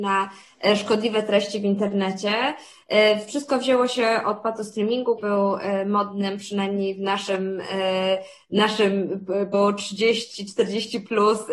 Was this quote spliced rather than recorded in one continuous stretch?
yes; 2 cuts; at 5.2 s, 9.5 s

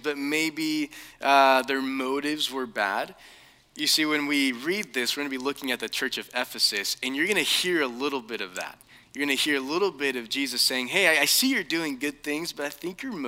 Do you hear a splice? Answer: no; 0 cuts

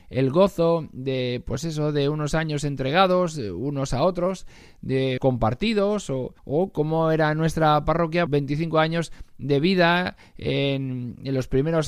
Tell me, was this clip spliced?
yes; 3 cuts; at 5.2 s, 6.4 s, 8.3 s

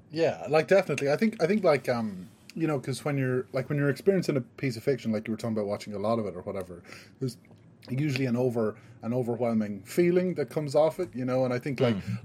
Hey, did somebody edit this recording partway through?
no; 0 cuts

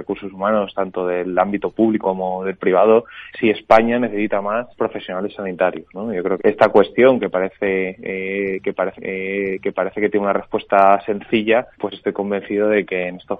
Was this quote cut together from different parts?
yes; 6 cuts; at 2.0 s, 3.3 s, 4.7 s, 6.4 s, 8.9 s, 11.7 s

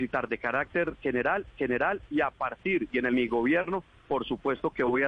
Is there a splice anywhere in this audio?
yes; 2 cuts; at 1.5 s, 3.1 s

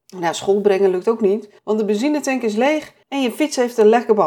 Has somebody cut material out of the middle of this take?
yes; 2 cuts; at 1.6 s, 3.0 s

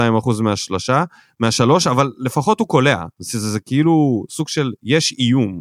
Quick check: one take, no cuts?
yes; 0 cuts

